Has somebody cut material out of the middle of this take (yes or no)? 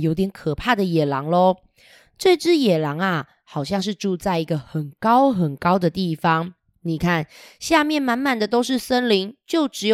no